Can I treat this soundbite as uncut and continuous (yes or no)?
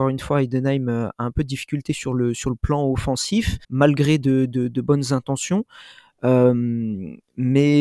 no